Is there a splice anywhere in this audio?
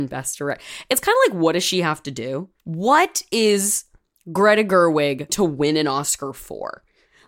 yes; 1 cut; at 5.3 s

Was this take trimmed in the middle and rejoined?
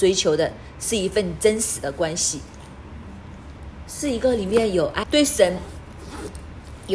yes; 1 cut; at 5.0 s

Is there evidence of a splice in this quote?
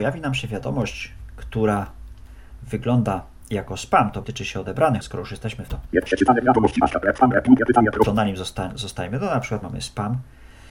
yes; 4 cuts; at 4.2 s, 5.0 s, 5.7 s, 9.6 s

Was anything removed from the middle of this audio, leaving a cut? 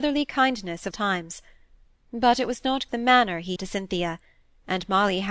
yes; 3 cuts; at 0.9 s, 2.9 s, 3.6 s

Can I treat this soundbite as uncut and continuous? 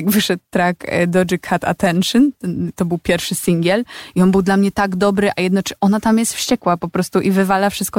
yes; 0 cuts

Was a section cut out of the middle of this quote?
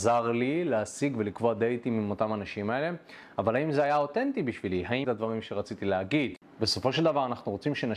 yes; 1 cut; at 5.0 s

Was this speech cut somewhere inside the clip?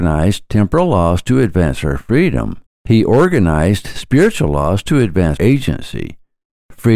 yes; 2 cuts; at 2.7 s, 5.4 s

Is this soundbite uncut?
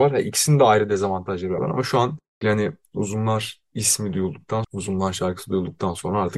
no; 3 cuts; at 1.6 s, 2.4 s, 4.6 s

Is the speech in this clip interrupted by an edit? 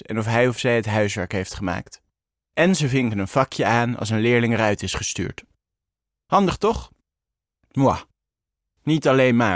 no; 0 cuts

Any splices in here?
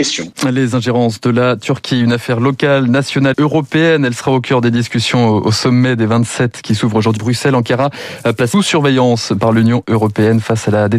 yes; 3 cuts; at 3.3 s, 7.2 s, 8.5 s

